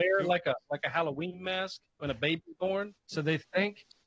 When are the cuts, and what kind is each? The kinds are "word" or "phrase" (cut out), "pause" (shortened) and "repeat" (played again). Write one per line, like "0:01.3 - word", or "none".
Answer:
0:01.9 - pause
0:03.0 - pause